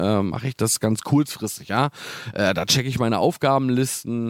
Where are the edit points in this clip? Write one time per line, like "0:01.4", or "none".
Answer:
none